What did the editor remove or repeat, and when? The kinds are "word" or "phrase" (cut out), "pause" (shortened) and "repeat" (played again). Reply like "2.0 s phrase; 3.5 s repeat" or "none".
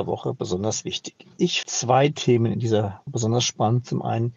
1.6 s word; 3.1 s word